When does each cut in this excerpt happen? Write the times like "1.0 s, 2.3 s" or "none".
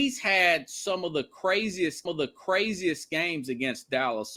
2.1 s